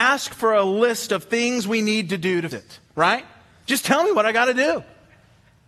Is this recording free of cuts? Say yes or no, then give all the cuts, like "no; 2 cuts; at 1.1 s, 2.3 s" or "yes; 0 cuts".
no; 1 cut; at 2.5 s